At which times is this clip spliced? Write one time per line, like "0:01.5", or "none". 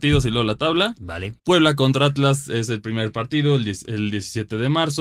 0:01.4